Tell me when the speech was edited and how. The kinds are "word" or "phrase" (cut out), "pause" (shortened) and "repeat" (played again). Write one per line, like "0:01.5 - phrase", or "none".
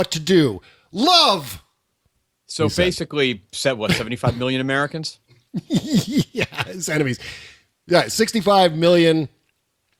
none